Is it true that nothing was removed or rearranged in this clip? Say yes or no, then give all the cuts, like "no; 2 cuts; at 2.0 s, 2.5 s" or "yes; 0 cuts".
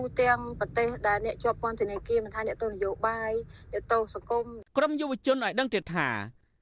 no; 1 cut; at 4.7 s